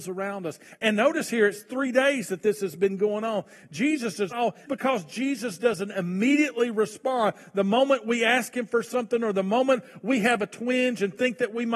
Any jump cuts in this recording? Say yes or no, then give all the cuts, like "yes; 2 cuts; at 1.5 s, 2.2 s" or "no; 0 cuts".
yes; 2 cuts; at 4.3 s, 4.7 s